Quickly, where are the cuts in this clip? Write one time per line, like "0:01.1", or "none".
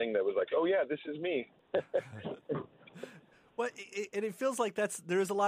none